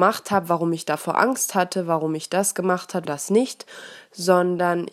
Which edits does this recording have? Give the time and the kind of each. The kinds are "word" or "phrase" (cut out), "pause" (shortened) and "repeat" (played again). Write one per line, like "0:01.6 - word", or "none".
0:03.1 - word